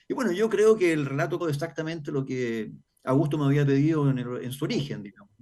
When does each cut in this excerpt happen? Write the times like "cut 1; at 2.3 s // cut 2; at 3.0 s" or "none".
cut 1; at 1.4 s

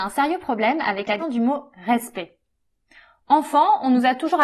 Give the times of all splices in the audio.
cut 1; at 1.2 s

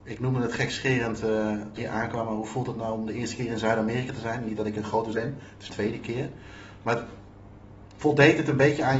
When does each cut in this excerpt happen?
cut 1; at 1.8 s // cut 2; at 5.1 s // cut 3; at 5.7 s

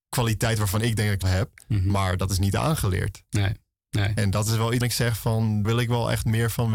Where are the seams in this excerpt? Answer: cut 1; at 1.2 s // cut 2; at 4.8 s // cut 3; at 5.6 s

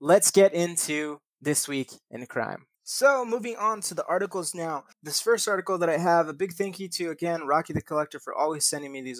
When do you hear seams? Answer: cut 1; at 2.7 s // cut 2; at 4.9 s

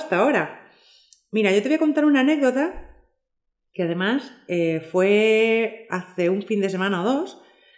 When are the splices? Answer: none

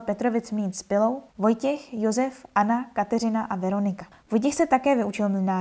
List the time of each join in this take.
cut 1; at 1.3 s // cut 2; at 4.1 s

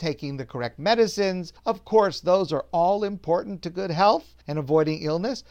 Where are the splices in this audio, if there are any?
cut 1; at 1.6 s // cut 2; at 4.4 s

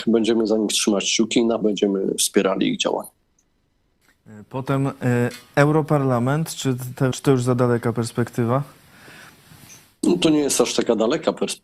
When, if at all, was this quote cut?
cut 1; at 1.6 s // cut 2; at 7.1 s

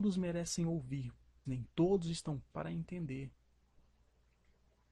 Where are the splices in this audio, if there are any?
cut 1; at 1.5 s // cut 2; at 2.5 s

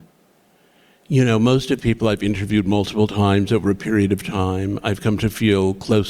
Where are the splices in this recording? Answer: cut 1; at 1.8 s

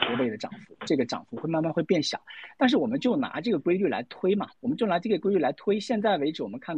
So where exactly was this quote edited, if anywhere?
cut 1; at 4.5 s

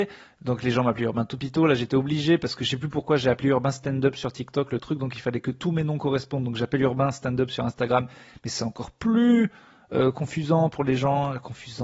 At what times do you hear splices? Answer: none

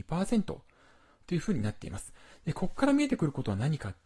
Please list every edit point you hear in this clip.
none

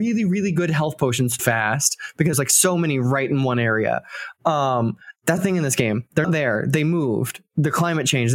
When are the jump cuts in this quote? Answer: cut 1; at 1.4 s // cut 2; at 2.3 s // cut 3; at 5.4 s // cut 4; at 6.2 s

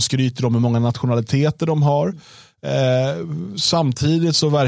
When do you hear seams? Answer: none

